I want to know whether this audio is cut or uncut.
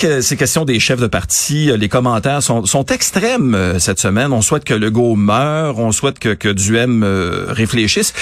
uncut